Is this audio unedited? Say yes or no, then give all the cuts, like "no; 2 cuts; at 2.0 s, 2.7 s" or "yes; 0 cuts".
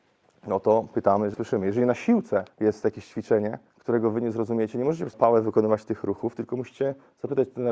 no; 4 cuts; at 1.3 s, 2.5 s, 3.7 s, 5.1 s